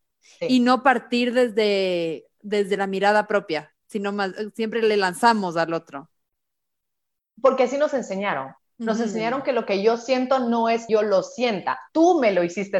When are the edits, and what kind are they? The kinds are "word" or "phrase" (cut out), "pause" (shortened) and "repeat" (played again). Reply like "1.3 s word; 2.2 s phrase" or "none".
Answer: 10.9 s word